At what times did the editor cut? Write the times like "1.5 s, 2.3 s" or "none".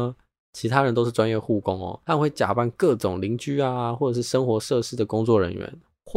2.0 s

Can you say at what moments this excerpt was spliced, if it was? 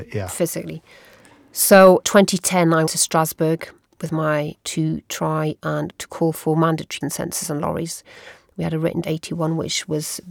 2.0 s, 2.9 s, 4.6 s, 5.9 s, 7.0 s, 9.0 s

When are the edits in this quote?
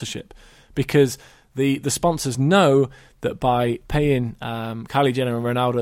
none

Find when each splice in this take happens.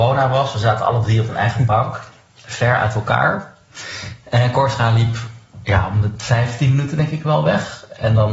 none

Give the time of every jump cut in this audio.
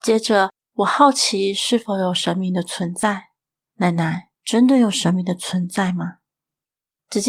4.3 s

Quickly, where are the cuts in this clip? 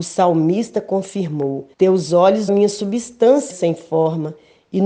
1.7 s, 2.5 s, 3.5 s

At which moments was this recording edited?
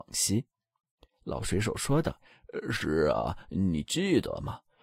none

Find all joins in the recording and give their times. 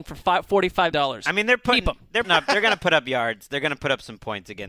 0.9 s, 2.2 s

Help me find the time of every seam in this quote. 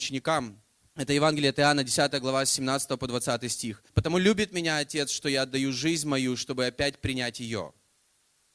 3.9 s

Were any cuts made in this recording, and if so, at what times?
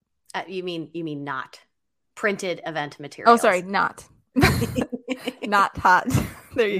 none

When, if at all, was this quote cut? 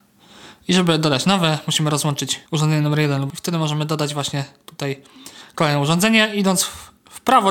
2.5 s, 3.3 s

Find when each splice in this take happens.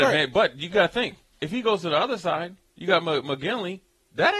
1.2 s

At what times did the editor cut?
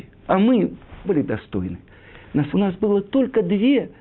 1.0 s, 2.5 s

